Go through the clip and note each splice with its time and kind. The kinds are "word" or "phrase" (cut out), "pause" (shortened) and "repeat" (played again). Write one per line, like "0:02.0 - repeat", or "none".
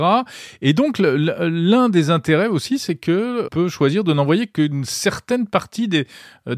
0:03.5 - word